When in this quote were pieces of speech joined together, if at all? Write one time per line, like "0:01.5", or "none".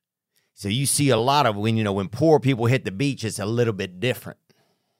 none